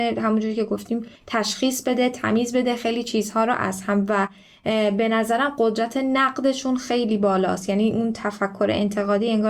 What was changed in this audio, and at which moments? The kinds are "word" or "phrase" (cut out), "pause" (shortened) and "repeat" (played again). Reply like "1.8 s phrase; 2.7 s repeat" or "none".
1.2 s pause